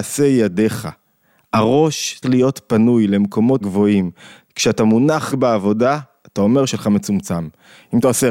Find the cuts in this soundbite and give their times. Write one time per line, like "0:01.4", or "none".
0:02.2
0:03.6
0:05.3
0:06.7